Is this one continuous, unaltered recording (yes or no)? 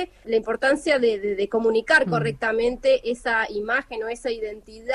yes